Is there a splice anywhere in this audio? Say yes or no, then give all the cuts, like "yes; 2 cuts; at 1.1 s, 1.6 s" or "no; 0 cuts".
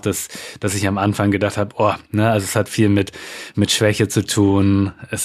no; 0 cuts